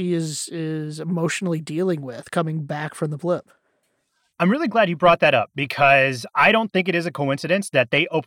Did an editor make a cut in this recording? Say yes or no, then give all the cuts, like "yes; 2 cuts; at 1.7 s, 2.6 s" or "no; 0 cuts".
no; 0 cuts